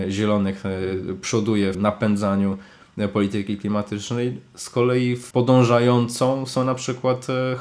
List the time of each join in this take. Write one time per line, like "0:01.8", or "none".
0:01.7
0:05.3